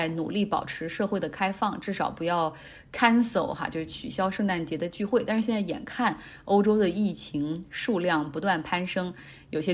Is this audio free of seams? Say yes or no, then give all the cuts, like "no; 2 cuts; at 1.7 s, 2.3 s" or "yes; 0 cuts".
yes; 0 cuts